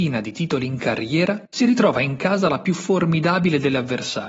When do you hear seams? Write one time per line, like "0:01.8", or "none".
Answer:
0:01.5